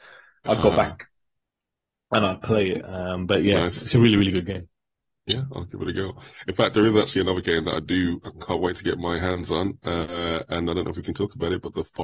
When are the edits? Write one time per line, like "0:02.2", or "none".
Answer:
none